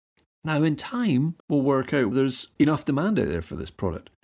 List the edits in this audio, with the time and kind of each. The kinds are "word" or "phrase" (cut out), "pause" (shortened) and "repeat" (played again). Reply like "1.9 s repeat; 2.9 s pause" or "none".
1.4 s pause; 2.1 s word; 2.6 s word